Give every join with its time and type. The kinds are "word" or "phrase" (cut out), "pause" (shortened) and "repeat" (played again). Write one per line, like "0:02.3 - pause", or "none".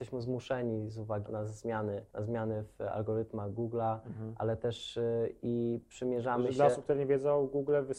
0:01.3 - word
0:02.1 - pause